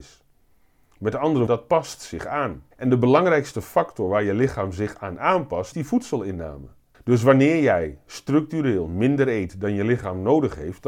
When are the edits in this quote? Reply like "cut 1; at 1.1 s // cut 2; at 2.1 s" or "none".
cut 1; at 1.5 s // cut 2; at 2.7 s // cut 3; at 5.7 s // cut 4; at 6.9 s